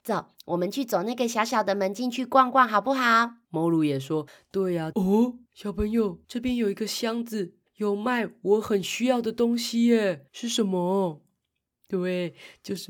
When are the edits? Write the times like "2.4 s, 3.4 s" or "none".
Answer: 3.4 s, 4.3 s, 4.9 s, 5.5 s, 6.2 s, 7.7 s, 10.3 s